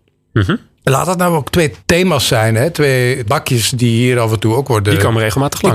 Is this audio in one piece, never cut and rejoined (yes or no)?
no